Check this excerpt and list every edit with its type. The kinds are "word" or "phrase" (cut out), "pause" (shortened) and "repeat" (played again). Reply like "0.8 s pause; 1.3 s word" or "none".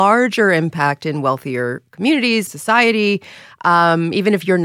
2.5 s word